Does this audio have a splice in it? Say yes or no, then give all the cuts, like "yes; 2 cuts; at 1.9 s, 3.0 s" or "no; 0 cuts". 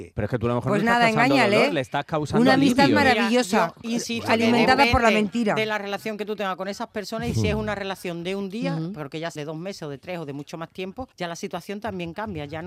yes; 2 cuts; at 9.4 s, 11.1 s